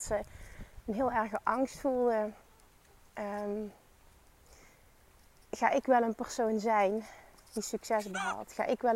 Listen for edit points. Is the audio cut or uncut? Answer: uncut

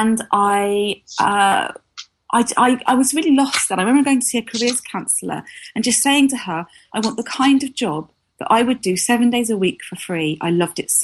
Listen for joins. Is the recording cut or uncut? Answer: uncut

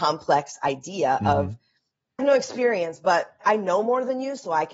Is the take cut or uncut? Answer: cut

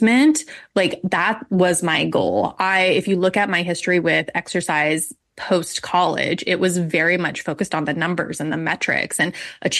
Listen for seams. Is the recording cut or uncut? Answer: uncut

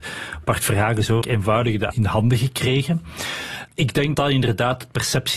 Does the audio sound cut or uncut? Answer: cut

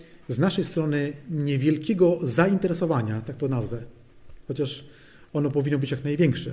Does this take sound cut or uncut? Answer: uncut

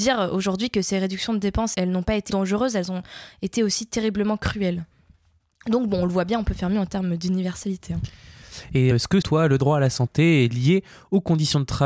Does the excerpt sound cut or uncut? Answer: cut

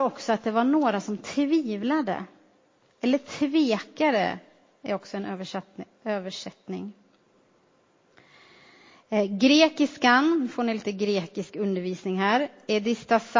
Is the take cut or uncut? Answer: uncut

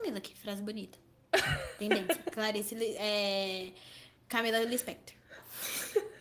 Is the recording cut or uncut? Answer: uncut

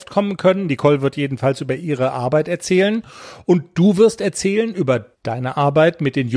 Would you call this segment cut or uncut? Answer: cut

